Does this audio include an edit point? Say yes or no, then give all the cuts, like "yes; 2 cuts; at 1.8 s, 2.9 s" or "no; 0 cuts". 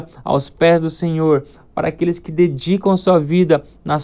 no; 0 cuts